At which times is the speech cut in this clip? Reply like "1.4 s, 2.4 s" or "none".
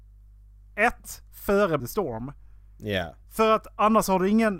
1.8 s, 3.2 s